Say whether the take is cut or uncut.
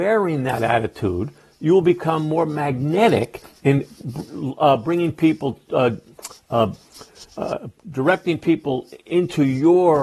uncut